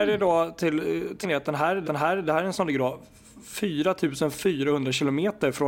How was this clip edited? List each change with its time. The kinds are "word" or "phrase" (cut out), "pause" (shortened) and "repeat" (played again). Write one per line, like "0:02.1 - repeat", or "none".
0:01.2 - word
0:01.8 - repeat
0:02.5 - word